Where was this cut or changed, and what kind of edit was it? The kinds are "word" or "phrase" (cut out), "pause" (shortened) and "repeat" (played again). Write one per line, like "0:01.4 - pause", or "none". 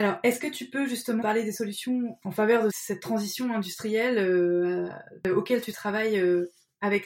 0:01.2 - word
0:02.2 - word
0:02.7 - word